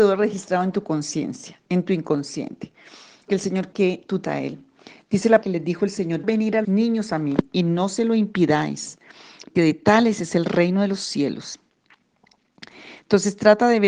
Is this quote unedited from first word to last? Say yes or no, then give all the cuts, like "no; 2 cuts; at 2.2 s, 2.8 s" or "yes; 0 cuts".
no; 7 cuts; at 3.3 s, 3.7 s, 4.2 s, 5.4 s, 6.2 s, 6.6 s, 9.6 s